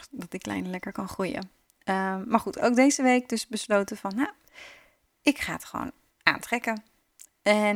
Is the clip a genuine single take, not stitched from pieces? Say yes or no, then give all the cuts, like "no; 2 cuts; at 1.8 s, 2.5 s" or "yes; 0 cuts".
yes; 0 cuts